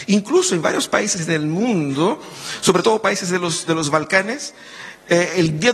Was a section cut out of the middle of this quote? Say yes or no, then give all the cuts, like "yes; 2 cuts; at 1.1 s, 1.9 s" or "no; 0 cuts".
no; 0 cuts